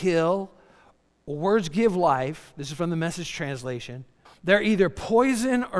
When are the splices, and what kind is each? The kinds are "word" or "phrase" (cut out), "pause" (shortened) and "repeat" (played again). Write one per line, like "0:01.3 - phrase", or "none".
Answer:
0:04.2 - pause